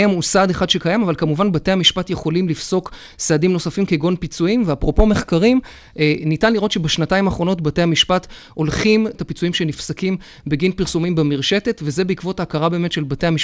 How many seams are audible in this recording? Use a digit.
1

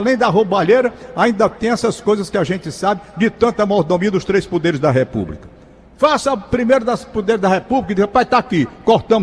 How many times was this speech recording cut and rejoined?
0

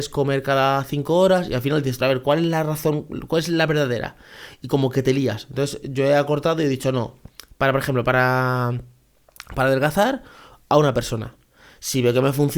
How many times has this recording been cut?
1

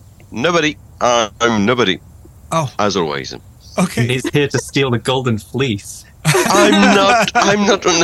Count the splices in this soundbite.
0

